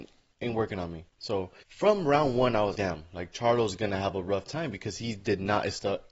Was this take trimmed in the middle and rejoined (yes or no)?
yes